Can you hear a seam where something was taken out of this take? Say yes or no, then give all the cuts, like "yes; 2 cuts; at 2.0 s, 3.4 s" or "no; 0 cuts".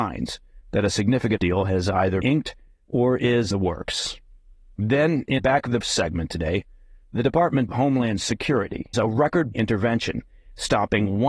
yes; 8 cuts; at 1.4 s, 2.2 s, 3.5 s, 5.4 s, 5.8 s, 7.7 s, 8.9 s, 9.5 s